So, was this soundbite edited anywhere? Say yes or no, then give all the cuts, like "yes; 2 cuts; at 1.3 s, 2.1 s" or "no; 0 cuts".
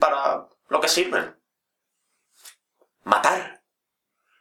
no; 0 cuts